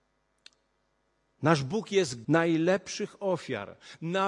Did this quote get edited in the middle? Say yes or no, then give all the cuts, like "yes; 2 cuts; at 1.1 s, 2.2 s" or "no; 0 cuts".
yes; 1 cut; at 2.2 s